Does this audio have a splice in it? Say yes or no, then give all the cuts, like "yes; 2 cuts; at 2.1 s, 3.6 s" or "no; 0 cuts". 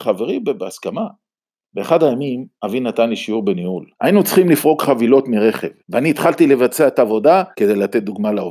yes; 5 cuts; at 1.3 s, 2.5 s, 3.9 s, 5.8 s, 7.5 s